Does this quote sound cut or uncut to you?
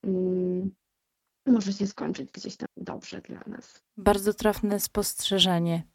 cut